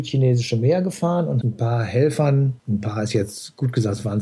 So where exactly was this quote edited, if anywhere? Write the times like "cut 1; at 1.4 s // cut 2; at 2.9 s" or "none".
cut 1; at 1.4 s // cut 2; at 2.6 s